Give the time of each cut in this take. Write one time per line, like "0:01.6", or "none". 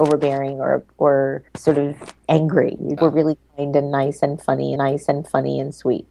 0:01.5
0:03.0
0:04.8